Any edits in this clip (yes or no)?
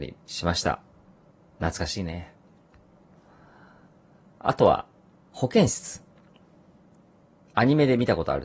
no